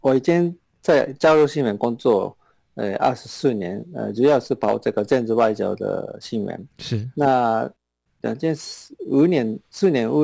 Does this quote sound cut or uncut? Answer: uncut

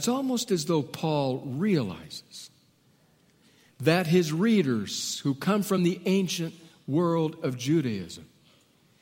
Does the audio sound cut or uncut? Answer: uncut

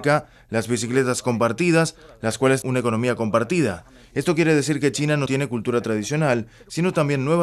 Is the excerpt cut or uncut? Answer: cut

